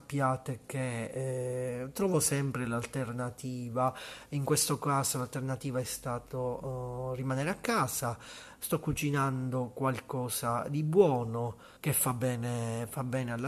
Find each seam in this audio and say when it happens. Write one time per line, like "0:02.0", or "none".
0:11.8